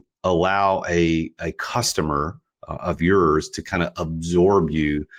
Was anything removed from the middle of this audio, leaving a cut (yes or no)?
no